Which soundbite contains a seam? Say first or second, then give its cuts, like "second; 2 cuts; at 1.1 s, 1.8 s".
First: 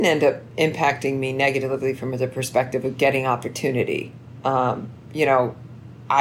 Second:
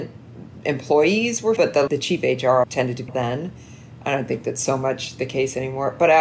second; 4 cuts; at 1.6 s, 1.9 s, 2.6 s, 3.1 s